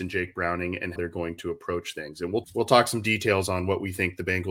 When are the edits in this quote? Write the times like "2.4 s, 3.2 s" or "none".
1.0 s, 2.4 s

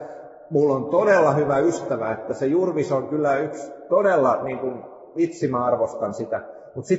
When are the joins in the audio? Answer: none

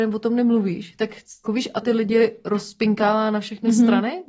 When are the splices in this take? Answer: 1.5 s, 1.8 s

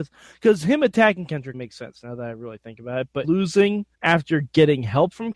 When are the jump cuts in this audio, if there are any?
1.5 s, 3.2 s, 3.9 s

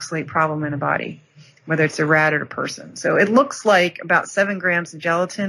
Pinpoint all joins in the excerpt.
none

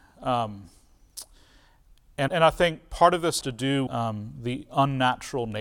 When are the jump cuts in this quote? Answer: 2.3 s, 3.4 s, 3.9 s, 4.7 s

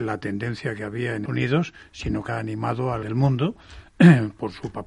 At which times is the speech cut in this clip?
1.3 s, 2.3 s, 3.0 s

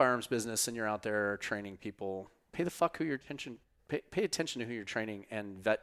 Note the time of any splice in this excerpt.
none

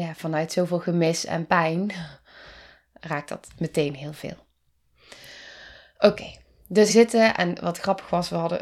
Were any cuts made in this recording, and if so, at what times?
6.9 s

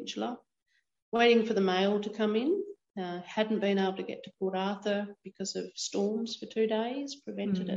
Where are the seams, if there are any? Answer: none

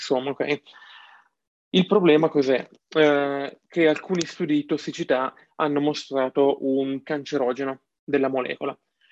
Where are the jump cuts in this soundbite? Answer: 7.0 s

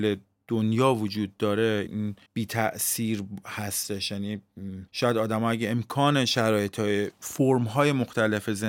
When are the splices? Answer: 1.9 s, 2.3 s, 4.9 s

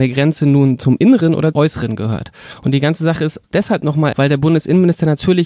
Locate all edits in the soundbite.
1.5 s, 3.4 s, 4.1 s

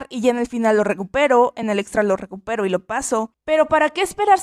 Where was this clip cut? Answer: none

